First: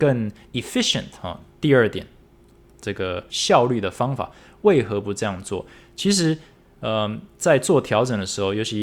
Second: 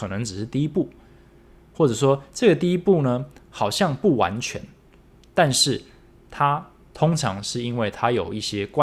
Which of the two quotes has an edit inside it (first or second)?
first